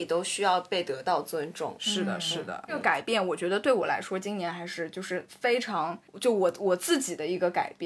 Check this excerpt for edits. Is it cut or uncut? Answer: cut